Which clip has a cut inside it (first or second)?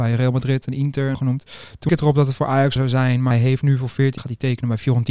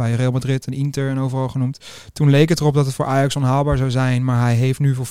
first